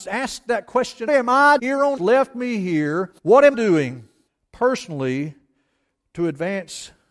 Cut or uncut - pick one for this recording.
cut